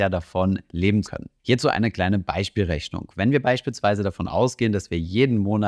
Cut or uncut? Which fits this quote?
cut